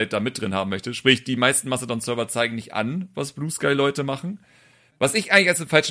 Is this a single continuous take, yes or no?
yes